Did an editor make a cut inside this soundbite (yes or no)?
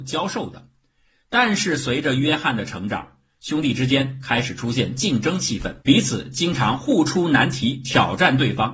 yes